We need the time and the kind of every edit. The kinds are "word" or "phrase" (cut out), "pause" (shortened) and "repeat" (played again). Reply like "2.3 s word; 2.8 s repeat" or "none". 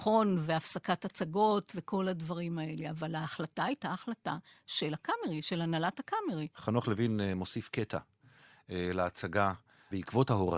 none